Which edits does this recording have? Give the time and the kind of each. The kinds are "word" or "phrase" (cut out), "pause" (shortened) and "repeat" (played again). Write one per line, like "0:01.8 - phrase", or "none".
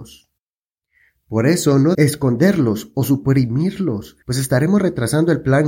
0:01.9 - word
0:04.2 - pause